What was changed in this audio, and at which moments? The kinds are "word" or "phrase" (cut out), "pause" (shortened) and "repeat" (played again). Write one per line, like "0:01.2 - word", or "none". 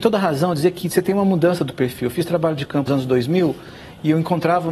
0:02.9 - word